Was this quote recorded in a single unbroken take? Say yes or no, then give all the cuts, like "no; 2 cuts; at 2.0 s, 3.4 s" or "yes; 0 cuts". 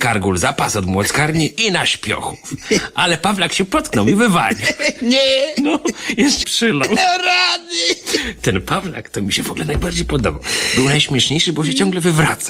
no; 1 cut; at 6.4 s